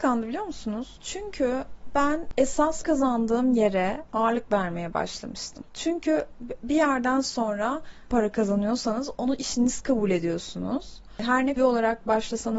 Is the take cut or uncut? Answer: cut